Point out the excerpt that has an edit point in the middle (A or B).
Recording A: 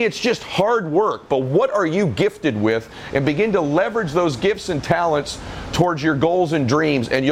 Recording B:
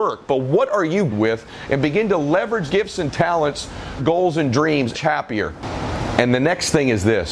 B